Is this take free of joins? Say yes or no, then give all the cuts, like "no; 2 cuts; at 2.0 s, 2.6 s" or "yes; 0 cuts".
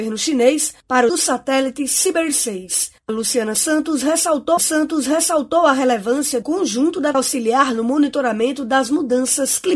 no; 5 cuts; at 1.1 s, 3.1 s, 4.6 s, 6.4 s, 7.1 s